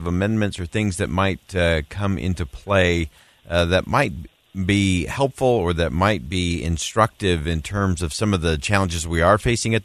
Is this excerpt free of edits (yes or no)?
yes